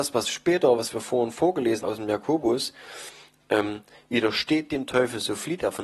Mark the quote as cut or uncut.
cut